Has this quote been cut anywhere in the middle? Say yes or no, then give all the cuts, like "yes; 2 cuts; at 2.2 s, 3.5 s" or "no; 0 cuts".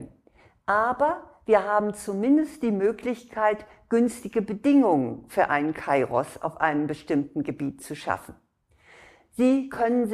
no; 0 cuts